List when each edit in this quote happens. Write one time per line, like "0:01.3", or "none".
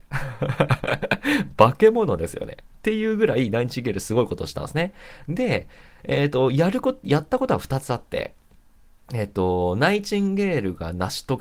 none

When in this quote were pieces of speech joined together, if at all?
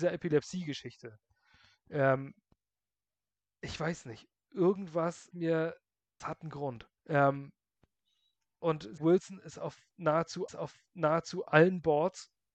0:05.3
0:06.2
0:07.0
0:09.0
0:10.5

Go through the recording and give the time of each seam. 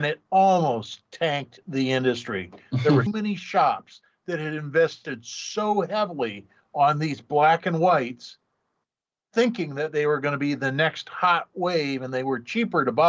0:03.1

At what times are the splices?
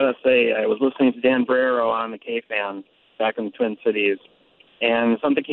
none

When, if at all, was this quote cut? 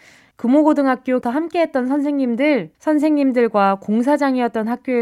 0:01.2
0:02.7

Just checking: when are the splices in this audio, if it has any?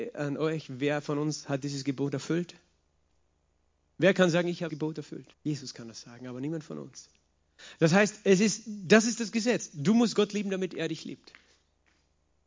0:04.7
0:05.3

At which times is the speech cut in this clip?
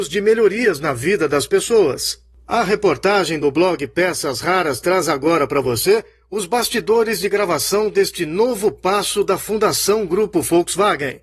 none

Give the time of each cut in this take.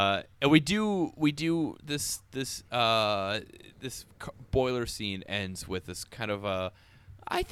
none

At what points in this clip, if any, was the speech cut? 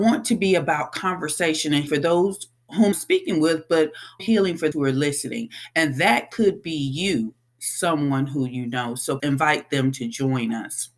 0:01.9
0:02.9
0:04.2
0:04.7
0:07.5
0:09.2

